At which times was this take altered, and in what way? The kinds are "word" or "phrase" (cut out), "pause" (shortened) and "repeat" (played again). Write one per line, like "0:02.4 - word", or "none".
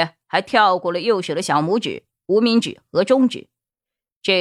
none